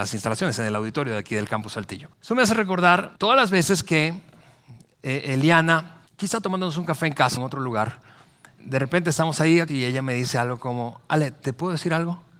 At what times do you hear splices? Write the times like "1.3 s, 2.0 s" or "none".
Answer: 2.1 s, 3.2 s, 6.1 s, 7.4 s, 8.6 s, 9.7 s